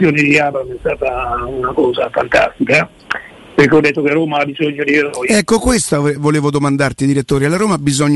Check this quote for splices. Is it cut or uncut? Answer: uncut